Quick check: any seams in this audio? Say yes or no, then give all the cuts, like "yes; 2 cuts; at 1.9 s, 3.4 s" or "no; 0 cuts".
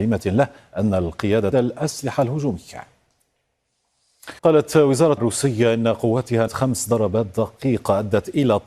yes; 4 cuts; at 1.5 s, 4.4 s, 5.2 s, 6.5 s